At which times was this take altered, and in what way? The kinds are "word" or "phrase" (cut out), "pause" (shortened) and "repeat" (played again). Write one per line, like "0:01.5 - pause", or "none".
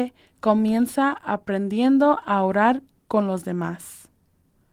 none